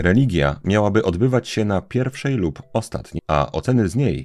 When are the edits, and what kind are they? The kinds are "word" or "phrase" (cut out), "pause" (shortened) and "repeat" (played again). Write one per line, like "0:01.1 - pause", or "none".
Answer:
0:03.2 - word